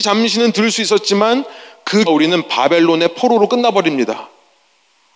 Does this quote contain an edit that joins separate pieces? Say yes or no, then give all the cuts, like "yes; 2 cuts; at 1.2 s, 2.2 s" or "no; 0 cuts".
yes; 1 cut; at 2.1 s